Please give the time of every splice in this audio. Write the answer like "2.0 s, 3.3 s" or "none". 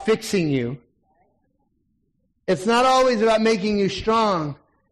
none